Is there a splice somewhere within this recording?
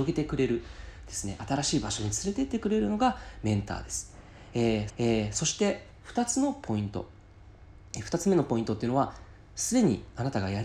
yes; 1 cut; at 4.9 s

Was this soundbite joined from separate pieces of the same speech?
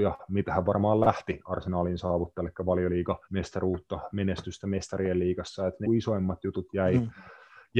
yes; 2 cuts; at 3.2 s, 5.8 s

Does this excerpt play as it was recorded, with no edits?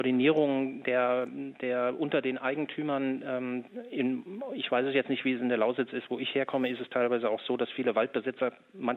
yes; 0 cuts

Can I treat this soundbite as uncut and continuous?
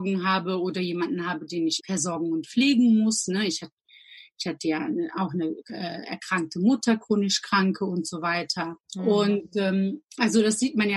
no; 2 cuts; at 1.8 s, 8.8 s

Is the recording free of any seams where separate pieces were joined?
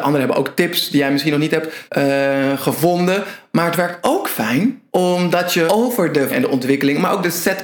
no; 4 cuts; at 1.9 s, 4.9 s, 5.7 s, 6.3 s

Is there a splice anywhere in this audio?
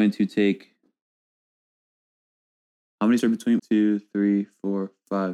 yes; 2 cuts; at 3.2 s, 3.6 s

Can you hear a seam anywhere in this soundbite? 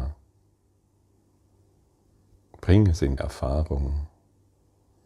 yes; 1 cut; at 3.2 s

